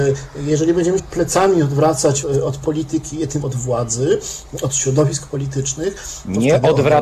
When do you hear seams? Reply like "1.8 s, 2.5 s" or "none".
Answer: 1.0 s, 2.2 s, 3.4 s